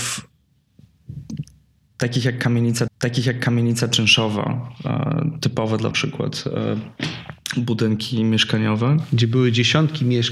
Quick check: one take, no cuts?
no; 2 cuts; at 2.9 s, 5.9 s

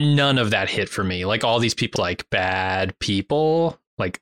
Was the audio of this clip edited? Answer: yes; 1 cut; at 2.0 s

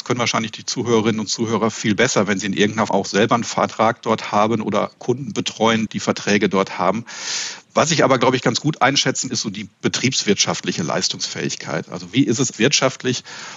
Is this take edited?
yes; 4 cuts; at 2.9 s, 5.9 s, 9.3 s, 12.5 s

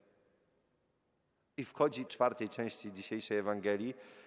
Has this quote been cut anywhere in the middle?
yes; 1 cut; at 2.1 s

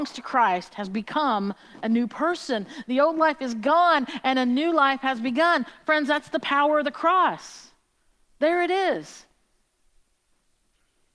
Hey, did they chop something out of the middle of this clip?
no; 0 cuts

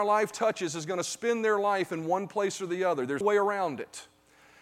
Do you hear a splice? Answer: yes; 1 cut; at 3.2 s

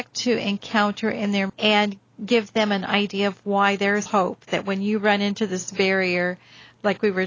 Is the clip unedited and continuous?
no; 2 cuts; at 1.5 s, 4.1 s

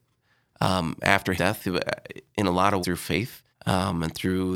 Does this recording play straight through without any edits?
no; 3 cuts; at 1.4 s, 2.8 s, 3.5 s

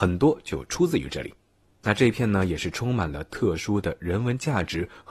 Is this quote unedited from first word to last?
yes; 0 cuts

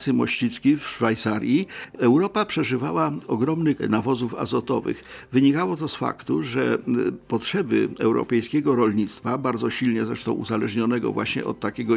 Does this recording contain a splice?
yes; 1 cut; at 3.8 s

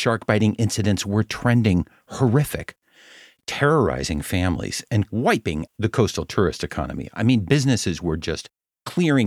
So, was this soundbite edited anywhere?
yes; 1 cut; at 5.7 s

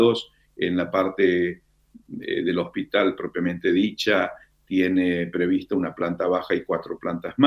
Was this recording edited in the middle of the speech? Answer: no; 0 cuts

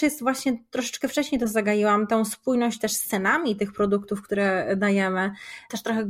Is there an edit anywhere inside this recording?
no; 0 cuts

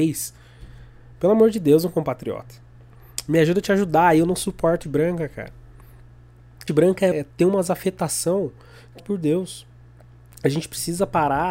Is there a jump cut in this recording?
yes; 4 cuts; at 4.8 s, 6.7 s, 7.1 s, 9.0 s

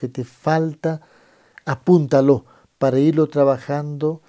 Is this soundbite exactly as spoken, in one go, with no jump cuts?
yes; 0 cuts

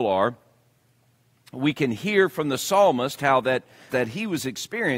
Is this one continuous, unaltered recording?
no; 1 cut; at 3.9 s

